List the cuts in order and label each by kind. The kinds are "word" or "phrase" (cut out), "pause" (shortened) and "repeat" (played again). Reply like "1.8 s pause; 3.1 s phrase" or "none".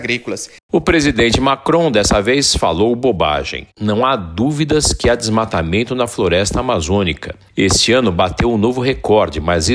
none